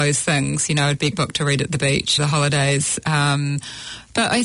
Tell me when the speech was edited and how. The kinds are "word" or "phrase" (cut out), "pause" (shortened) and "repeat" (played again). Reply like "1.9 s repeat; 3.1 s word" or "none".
1.1 s word; 2.2 s phrase